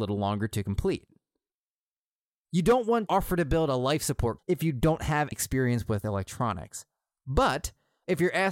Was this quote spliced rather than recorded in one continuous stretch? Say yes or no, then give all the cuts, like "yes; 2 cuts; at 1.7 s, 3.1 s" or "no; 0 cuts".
yes; 3 cuts; at 3.1 s, 4.4 s, 5.3 s